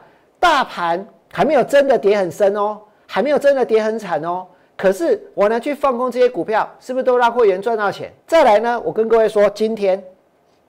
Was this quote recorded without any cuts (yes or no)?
no